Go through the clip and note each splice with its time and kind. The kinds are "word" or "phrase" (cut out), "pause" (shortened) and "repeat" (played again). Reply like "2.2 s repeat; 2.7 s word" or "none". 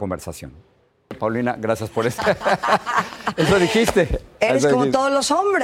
none